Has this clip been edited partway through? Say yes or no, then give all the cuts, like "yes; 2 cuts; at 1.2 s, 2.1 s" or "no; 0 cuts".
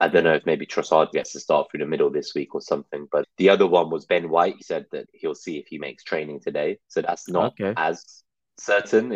yes; 5 cuts; at 1.1 s, 3.2 s, 4.6 s, 5.0 s, 6.8 s